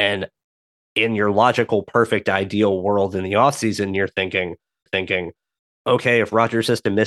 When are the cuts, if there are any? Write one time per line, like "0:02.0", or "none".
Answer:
0:04.9